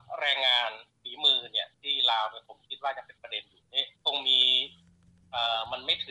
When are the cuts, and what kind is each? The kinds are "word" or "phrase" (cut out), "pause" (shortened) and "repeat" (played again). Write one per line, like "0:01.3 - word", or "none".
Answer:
0:04.0 - pause